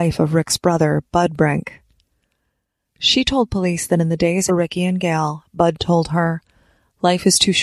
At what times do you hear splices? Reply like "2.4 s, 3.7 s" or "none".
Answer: 4.5 s